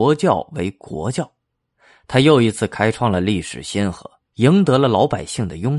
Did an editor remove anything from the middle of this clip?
no; 0 cuts

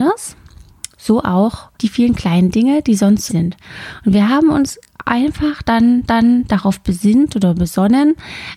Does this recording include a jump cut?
yes; 3 cuts; at 1.7 s, 3.3 s, 6.1 s

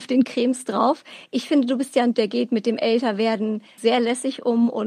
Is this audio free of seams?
no; 2 cuts; at 2.1 s, 3.8 s

